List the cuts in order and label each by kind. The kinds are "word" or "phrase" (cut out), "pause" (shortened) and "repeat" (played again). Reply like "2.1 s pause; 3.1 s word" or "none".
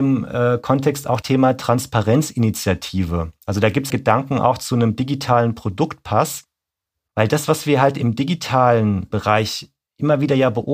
1.2 s word; 3.9 s word; 9.1 s word